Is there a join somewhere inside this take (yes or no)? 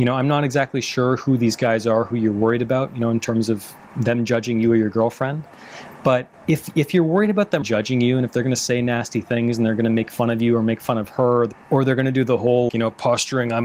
yes